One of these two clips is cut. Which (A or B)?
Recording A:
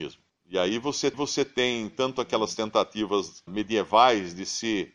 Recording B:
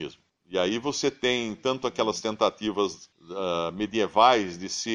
A